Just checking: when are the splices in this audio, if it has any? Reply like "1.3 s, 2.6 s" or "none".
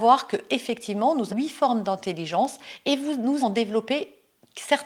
1.3 s, 3.4 s